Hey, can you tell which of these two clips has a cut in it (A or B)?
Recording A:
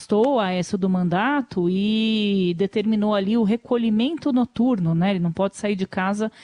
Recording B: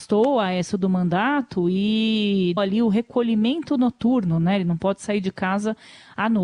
B